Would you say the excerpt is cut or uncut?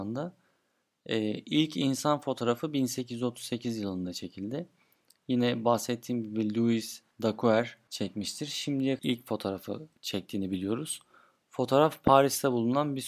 cut